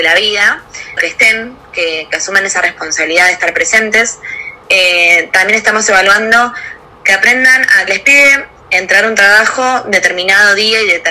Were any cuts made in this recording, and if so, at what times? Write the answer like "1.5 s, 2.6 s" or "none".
1.0 s, 6.8 s, 7.9 s